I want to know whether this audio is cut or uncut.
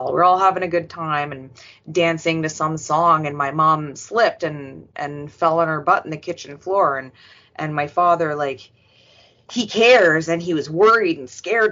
uncut